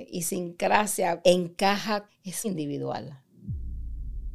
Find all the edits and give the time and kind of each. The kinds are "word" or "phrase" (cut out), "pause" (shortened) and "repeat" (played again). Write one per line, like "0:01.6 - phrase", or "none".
0:01.2 - word
0:02.1 - word
0:02.4 - word